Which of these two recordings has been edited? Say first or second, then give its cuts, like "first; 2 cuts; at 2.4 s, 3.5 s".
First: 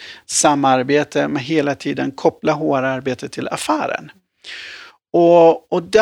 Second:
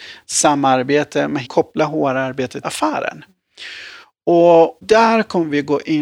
second; 3 cuts; at 1.4 s, 2.6 s, 4.8 s